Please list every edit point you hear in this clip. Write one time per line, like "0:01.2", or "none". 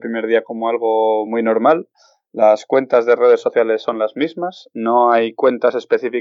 none